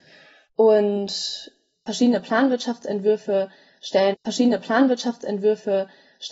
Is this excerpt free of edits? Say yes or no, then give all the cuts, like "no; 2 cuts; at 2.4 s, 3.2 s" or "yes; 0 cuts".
no; 1 cut; at 4.1 s